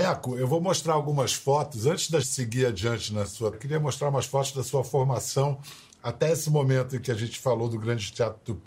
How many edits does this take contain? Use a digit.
2